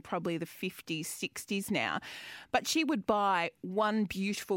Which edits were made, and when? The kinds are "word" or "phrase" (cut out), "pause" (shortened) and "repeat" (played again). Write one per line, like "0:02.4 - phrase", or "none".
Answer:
none